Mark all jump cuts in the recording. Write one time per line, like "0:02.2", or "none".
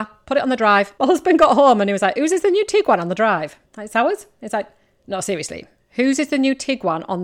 none